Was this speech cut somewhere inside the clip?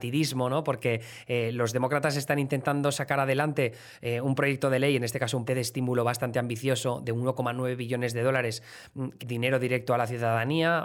yes; 2 cuts; at 5.5 s, 9.2 s

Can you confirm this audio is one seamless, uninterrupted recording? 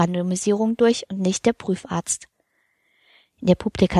yes; 0 cuts

